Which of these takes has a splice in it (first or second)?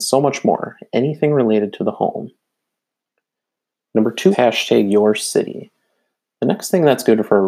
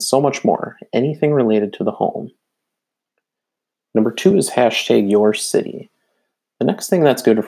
first